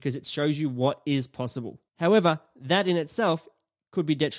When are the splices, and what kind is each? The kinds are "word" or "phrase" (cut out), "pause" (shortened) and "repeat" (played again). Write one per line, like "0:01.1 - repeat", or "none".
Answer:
0:01.9 - pause